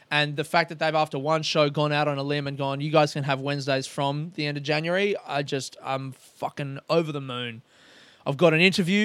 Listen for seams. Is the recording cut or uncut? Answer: uncut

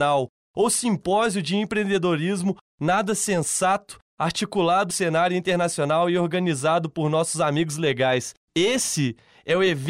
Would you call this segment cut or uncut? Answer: cut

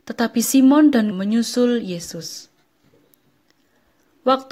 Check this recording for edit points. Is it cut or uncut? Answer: cut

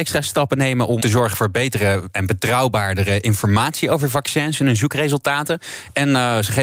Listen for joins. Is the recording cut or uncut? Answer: cut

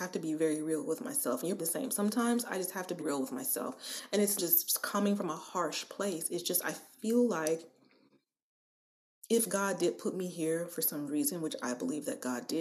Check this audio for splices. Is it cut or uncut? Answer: cut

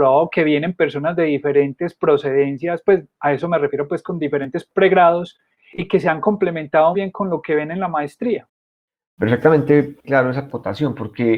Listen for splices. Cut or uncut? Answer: cut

